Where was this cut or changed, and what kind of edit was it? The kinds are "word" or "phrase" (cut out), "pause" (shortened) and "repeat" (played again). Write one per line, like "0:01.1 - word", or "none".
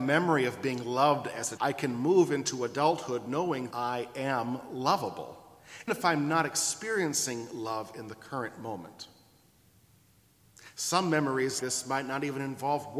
0:01.6 - word
0:03.7 - word
0:05.9 - word
0:11.6 - word